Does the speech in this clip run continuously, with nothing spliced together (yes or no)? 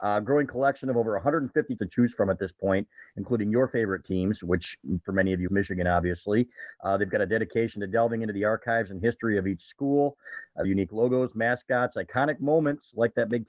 no